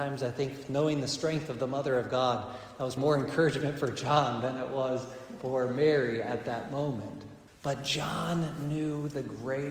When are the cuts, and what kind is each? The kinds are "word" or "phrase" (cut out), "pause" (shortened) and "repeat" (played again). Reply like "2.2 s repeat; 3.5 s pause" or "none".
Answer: 3.0 s word; 7.5 s pause

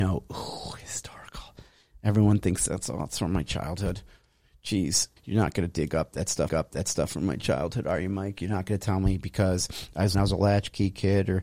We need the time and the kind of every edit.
5.2 s word; 6.5 s repeat; 10.1 s phrase

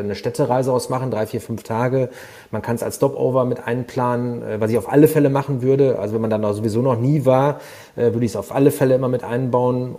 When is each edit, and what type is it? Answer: none

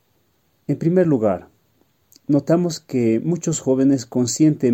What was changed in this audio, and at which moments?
none

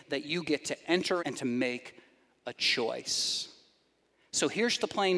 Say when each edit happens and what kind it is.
1.2 s word

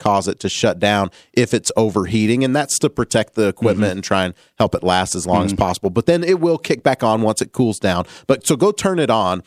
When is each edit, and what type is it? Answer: none

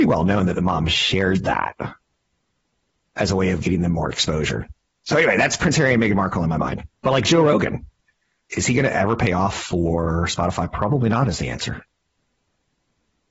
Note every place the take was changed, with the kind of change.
6.9 s pause

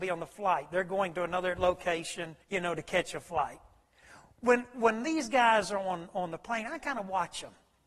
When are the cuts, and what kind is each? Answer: 2.4 s pause

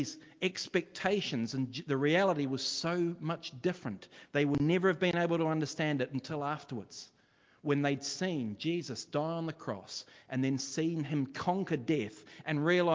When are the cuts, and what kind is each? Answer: none

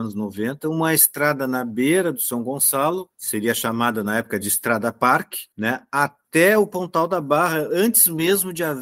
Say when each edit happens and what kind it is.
3.1 s pause; 5.5 s pause

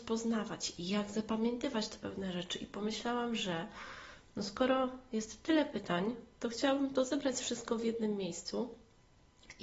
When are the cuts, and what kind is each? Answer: 6.3 s pause

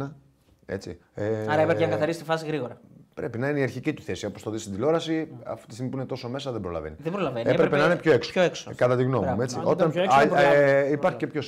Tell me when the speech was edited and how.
1.0 s pause; 1.7 s word

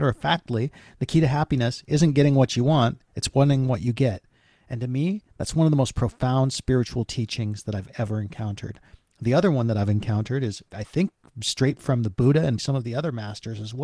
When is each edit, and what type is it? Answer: 10.7 s word; 12.6 s word

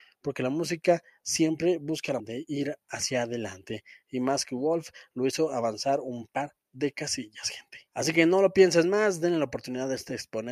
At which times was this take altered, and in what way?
2.2 s word; 7.9 s pause

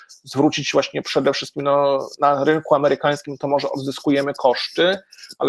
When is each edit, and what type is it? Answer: none

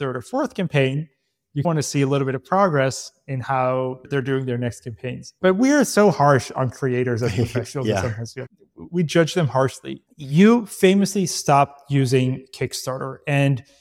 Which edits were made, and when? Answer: 5.4 s pause

